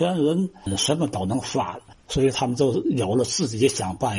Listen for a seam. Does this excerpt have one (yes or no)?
yes